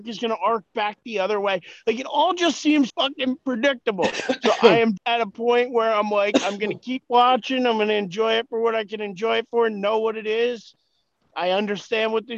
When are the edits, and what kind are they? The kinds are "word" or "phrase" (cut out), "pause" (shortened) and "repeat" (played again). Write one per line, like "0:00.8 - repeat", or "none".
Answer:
0:02.9 - word
0:05.0 - word